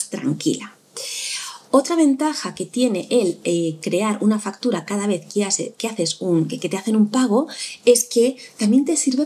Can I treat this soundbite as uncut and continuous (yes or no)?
yes